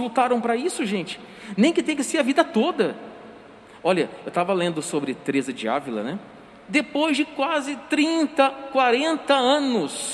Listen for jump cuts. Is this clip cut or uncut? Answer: uncut